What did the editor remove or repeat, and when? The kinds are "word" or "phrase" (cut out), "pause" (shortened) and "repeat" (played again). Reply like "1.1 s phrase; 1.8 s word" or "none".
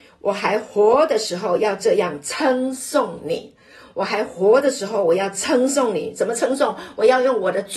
none